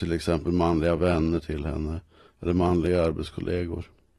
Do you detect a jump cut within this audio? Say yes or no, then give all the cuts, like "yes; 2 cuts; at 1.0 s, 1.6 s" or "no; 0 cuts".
no; 0 cuts